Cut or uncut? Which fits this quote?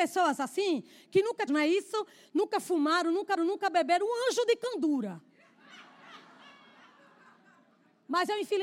cut